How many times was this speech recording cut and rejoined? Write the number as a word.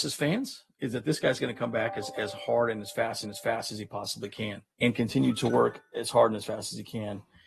two